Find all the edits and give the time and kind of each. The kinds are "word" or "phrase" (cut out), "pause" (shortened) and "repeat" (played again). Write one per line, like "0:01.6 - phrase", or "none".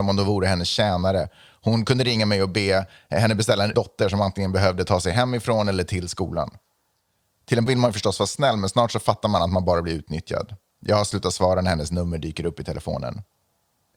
0:03.7 - phrase
0:07.7 - word